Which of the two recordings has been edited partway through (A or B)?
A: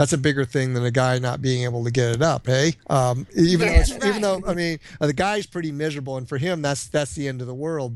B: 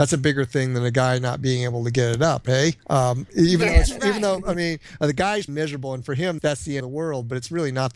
B